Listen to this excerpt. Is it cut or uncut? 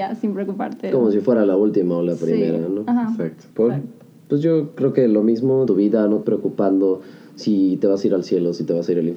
cut